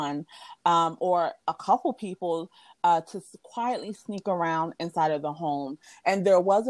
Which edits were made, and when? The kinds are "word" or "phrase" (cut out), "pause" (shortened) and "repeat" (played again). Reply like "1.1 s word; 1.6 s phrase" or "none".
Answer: 1.4 s pause